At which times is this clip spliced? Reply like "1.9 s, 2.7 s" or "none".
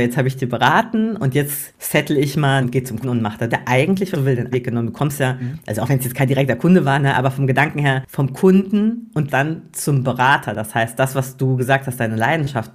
2.6 s, 3.0 s, 3.5 s, 4.1 s, 4.5 s, 9.3 s